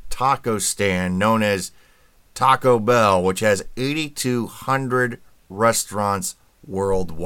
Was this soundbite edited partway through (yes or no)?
no